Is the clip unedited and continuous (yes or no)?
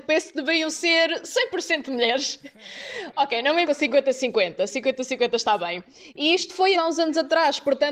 no